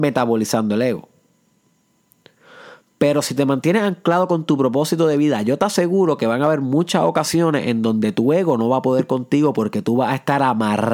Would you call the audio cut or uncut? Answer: uncut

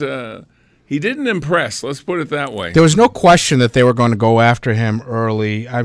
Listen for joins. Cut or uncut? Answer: uncut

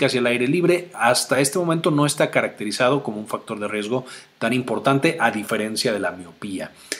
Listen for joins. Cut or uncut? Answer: uncut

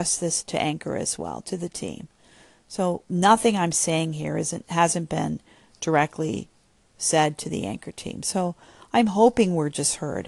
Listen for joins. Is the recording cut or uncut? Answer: uncut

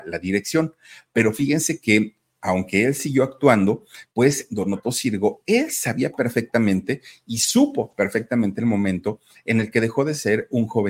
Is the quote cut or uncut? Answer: uncut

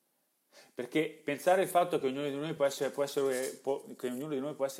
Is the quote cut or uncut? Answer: uncut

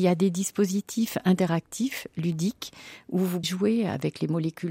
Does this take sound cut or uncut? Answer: cut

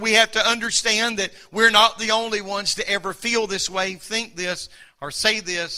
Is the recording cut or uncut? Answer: uncut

